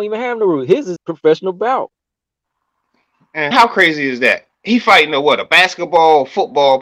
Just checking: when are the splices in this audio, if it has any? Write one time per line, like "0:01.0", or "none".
0:01.0
0:03.5
0:04.5